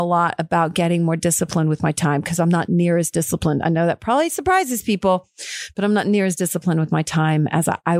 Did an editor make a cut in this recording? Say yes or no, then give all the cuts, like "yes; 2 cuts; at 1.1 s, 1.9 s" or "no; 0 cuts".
no; 0 cuts